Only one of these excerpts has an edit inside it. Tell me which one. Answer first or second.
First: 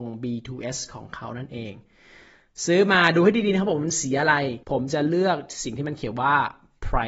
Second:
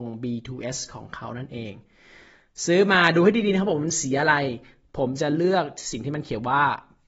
first